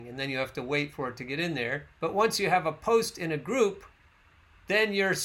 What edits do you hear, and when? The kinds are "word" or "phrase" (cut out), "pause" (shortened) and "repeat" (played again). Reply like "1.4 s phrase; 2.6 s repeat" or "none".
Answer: 2.0 s pause